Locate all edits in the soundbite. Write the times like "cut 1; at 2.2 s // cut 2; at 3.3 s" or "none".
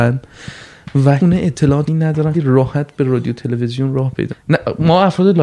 cut 1; at 1.2 s // cut 2; at 1.9 s // cut 3; at 2.3 s // cut 4; at 4.3 s

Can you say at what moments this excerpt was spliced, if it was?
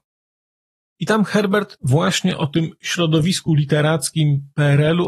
none

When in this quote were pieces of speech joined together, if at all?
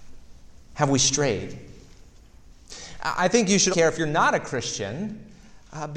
cut 1; at 3.7 s

